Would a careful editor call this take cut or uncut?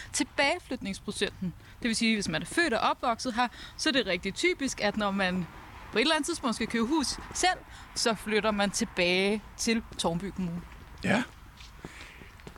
uncut